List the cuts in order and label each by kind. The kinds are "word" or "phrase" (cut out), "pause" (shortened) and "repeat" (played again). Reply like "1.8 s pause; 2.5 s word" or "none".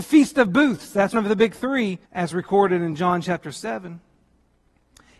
1.1 s word; 2.1 s pause